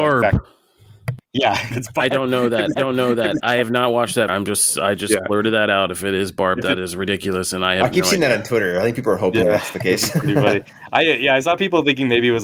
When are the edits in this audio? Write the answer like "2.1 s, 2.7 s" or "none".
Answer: 1.2 s, 1.7 s, 2.8 s, 4.3 s